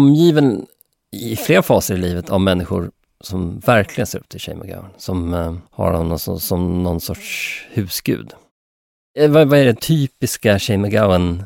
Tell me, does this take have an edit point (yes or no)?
yes